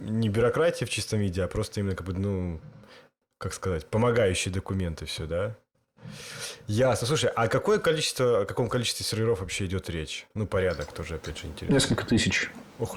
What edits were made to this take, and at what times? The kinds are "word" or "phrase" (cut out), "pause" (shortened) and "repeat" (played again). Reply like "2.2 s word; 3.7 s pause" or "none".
none